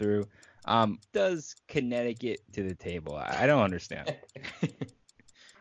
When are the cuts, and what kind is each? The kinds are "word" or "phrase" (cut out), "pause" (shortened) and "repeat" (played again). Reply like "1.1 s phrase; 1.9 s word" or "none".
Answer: 1.1 s word; 2.5 s word